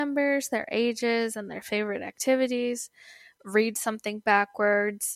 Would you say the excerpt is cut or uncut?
uncut